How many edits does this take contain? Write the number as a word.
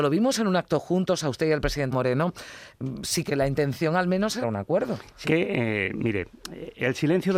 four